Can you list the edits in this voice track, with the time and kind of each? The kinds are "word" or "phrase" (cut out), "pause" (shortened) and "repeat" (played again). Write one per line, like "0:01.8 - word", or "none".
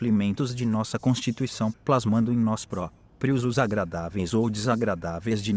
0:01.7 - word
0:03.5 - word